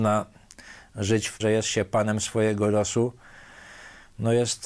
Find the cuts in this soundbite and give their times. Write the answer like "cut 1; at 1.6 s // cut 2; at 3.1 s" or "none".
cut 1; at 1.4 s